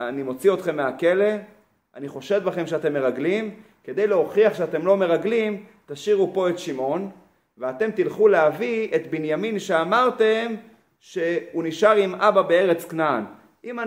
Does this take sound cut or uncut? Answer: uncut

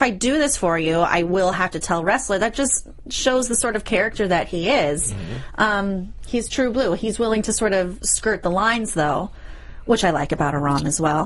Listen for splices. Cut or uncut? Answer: uncut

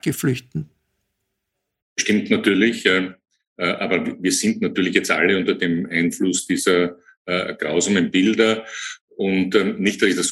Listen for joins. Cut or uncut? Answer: uncut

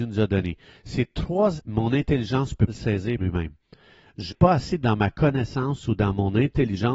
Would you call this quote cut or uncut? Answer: cut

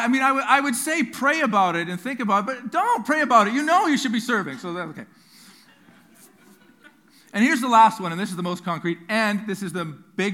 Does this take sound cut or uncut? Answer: uncut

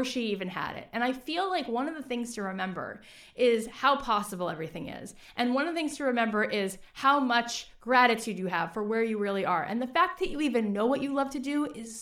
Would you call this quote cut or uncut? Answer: uncut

